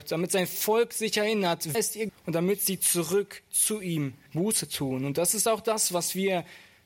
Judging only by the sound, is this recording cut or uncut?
cut